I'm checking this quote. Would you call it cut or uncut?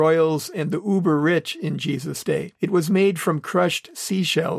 cut